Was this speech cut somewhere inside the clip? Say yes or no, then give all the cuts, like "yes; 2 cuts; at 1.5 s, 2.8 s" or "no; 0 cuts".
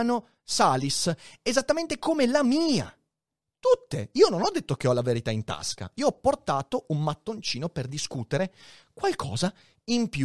no; 0 cuts